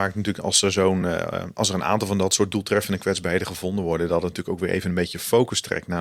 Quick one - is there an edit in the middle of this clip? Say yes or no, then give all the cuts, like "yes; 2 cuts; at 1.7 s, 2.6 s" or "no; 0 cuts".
no; 0 cuts